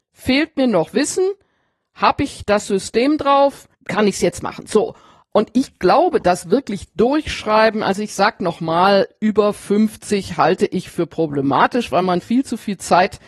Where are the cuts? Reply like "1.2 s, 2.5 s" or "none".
none